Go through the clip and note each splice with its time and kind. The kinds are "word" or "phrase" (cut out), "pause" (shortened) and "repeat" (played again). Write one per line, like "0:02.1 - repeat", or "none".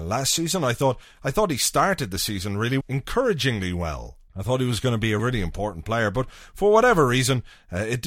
0:02.8 - word
0:04.3 - pause
0:05.2 - word